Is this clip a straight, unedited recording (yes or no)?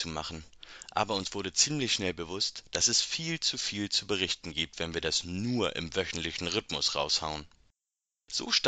yes